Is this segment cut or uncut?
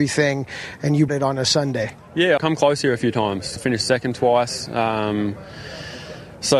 cut